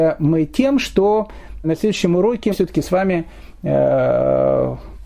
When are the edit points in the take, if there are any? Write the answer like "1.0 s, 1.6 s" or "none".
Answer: 1.6 s, 2.5 s